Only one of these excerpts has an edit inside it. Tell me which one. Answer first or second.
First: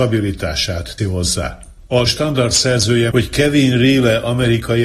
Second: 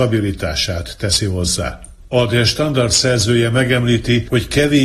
first